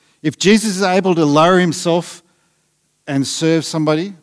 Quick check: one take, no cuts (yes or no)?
yes